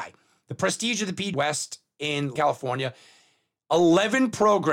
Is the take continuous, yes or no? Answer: no